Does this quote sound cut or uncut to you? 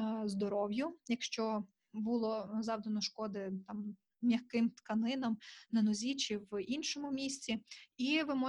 uncut